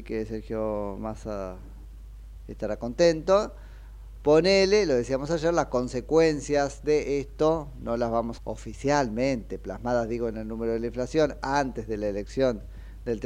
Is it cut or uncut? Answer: cut